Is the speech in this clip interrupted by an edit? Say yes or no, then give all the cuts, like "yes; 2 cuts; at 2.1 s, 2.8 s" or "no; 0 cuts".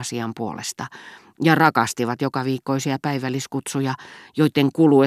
no; 0 cuts